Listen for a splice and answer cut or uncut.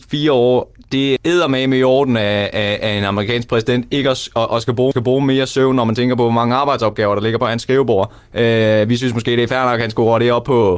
cut